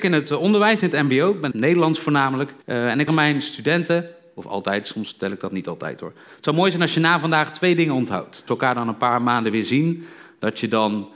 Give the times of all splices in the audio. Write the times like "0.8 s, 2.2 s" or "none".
1.5 s, 2.6 s, 3.1 s, 8.5 s